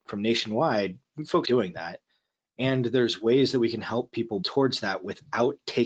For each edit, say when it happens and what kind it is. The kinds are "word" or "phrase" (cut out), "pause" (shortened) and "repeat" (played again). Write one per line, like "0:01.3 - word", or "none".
0:01.4 - word
0:04.4 - word